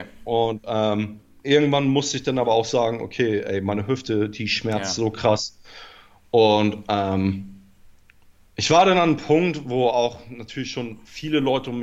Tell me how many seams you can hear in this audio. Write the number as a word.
zero